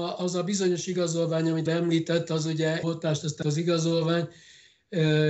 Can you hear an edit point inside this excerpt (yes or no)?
yes